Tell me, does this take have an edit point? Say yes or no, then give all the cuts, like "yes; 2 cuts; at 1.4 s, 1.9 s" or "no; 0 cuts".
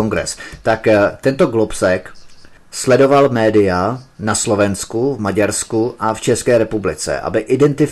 yes; 1 cut; at 2.6 s